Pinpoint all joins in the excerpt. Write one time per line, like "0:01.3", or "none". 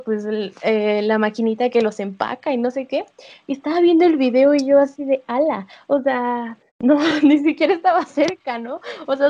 0:06.7